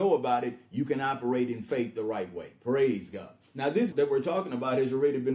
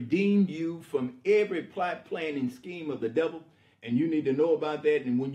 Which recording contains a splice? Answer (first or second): first